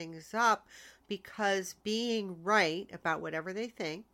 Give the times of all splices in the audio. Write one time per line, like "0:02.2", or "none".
0:01.8

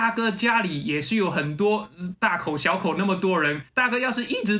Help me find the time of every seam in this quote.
0:03.7

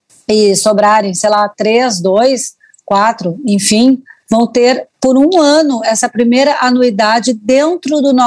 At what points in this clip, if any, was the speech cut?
none

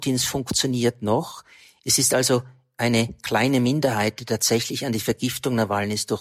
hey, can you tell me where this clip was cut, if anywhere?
none

